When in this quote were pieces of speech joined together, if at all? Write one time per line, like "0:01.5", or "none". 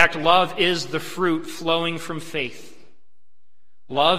none